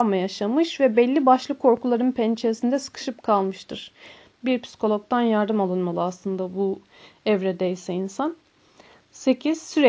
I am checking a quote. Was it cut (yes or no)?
no